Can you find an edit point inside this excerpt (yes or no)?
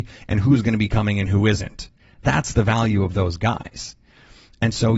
no